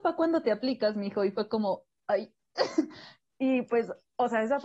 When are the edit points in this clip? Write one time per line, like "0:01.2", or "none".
none